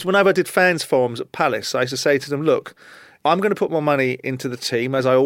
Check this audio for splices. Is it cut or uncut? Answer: uncut